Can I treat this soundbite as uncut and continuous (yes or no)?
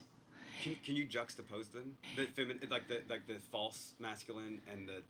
no